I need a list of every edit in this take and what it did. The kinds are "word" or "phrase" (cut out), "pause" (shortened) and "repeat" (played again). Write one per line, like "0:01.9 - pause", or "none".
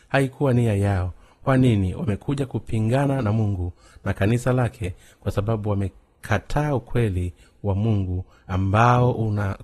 none